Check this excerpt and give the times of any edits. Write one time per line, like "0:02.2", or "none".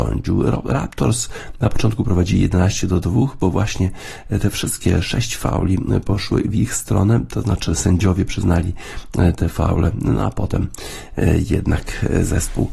none